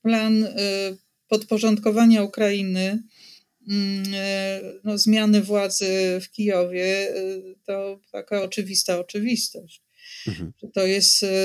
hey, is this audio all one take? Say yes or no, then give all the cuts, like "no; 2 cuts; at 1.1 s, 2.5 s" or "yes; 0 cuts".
yes; 0 cuts